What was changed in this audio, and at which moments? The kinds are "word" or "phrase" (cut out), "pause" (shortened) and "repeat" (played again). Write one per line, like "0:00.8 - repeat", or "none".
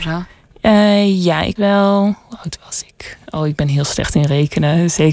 0:01.6 - word

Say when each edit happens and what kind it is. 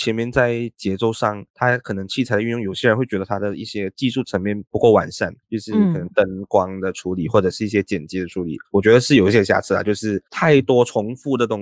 0:01.5 - pause
0:04.7 - pause
0:05.4 - pause
0:08.6 - pause
0:10.3 - pause

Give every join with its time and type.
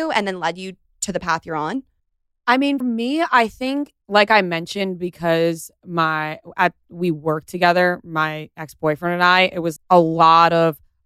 0:02.0 - pause
0:02.8 - word
0:04.0 - pause
0:09.8 - word

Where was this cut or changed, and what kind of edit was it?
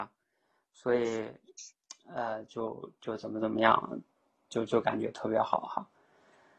none

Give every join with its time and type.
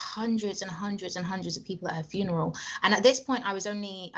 none

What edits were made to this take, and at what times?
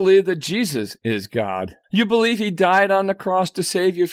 0:01.8 - pause

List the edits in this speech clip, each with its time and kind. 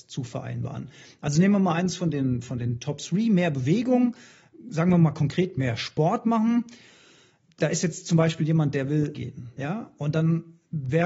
0:09.1 - word

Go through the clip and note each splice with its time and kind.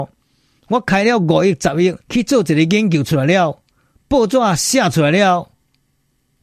0:02.0 - pause

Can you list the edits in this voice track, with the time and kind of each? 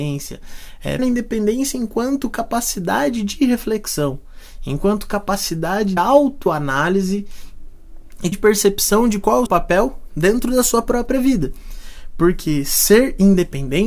0:01.0 - word
0:06.0 - word
0:08.3 - word
0:09.5 - word

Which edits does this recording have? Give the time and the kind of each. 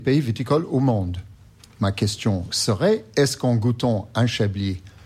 0:02.5 - word

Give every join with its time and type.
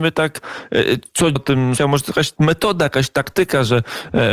0:01.4 - word
0:01.8 - word

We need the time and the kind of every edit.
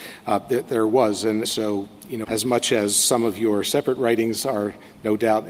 0:01.4 - word
0:02.2 - word

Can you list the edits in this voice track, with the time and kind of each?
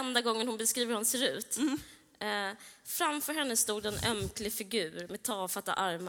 none

